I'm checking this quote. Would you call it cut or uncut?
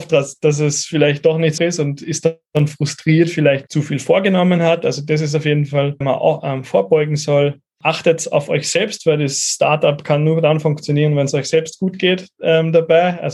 cut